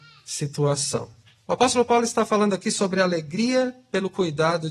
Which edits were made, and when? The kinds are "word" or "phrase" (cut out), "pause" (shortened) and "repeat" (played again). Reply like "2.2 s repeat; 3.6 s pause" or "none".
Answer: none

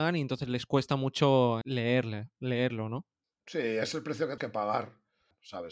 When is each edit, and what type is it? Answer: 1.6 s word; 4.4 s word

